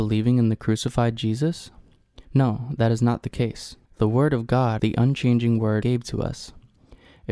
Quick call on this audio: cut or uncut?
cut